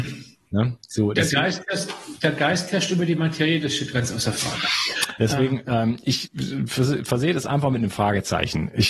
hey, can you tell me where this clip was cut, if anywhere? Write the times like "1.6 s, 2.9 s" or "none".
none